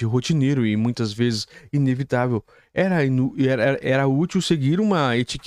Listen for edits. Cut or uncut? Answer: uncut